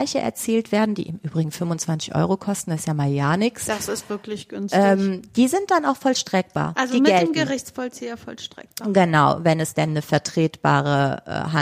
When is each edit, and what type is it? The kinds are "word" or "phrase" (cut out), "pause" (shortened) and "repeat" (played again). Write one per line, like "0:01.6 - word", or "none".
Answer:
none